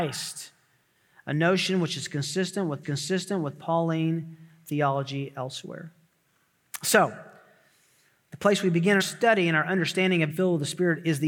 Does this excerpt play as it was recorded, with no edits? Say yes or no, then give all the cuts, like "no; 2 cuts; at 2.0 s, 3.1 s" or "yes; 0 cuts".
no; 3 cuts; at 2.8 s, 9.0 s, 10.3 s